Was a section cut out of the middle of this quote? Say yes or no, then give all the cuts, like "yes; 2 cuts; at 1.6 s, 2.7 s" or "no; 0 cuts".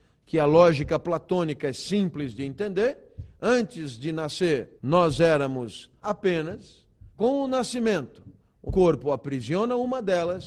yes; 4 cuts; at 4.8 s, 6.0 s, 7.1 s, 8.7 s